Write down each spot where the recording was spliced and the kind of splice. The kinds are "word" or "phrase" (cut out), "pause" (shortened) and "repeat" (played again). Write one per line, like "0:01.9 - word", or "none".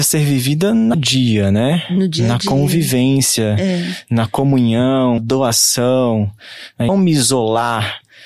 0:00.9 - phrase
0:05.2 - word
0:06.9 - word